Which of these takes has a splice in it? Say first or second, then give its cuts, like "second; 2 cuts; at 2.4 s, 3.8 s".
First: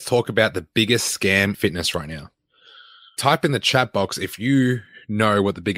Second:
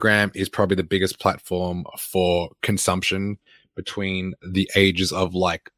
first; 1 cut; at 1.5 s